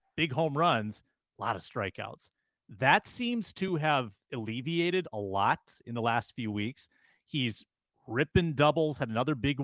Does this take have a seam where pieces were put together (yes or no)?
no